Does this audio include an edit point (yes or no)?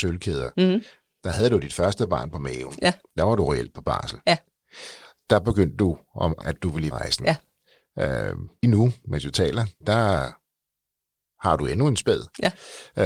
yes